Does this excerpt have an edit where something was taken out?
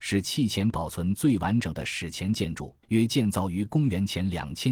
yes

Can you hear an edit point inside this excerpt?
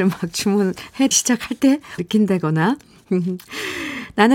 yes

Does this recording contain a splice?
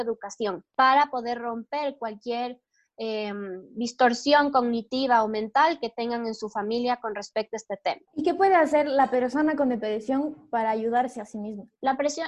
no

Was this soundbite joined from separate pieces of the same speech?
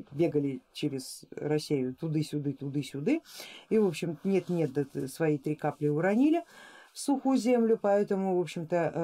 no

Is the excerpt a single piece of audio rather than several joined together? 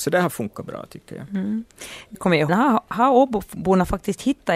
no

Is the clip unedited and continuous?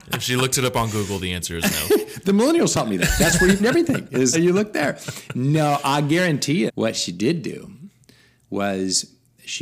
no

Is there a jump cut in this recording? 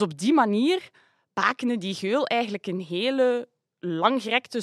no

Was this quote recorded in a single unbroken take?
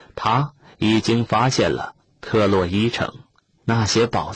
yes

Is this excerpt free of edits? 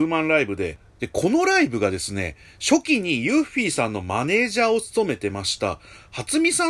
yes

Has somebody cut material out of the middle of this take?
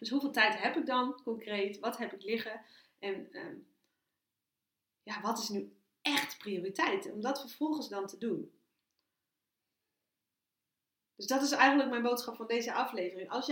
no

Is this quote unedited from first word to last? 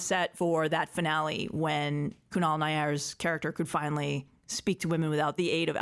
yes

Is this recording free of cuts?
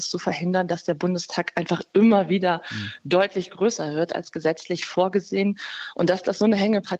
yes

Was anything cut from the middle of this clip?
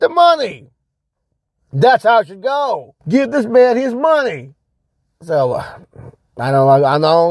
yes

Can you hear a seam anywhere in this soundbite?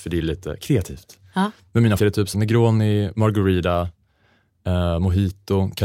yes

